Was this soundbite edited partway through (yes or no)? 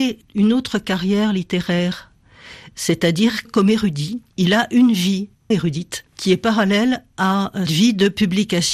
yes